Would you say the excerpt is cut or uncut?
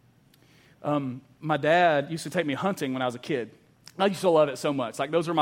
cut